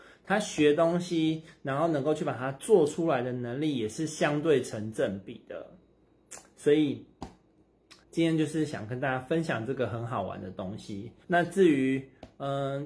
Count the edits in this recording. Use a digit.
2